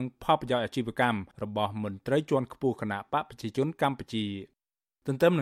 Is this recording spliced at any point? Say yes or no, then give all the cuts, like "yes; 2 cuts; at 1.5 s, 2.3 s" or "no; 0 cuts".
yes; 1 cut; at 1.3 s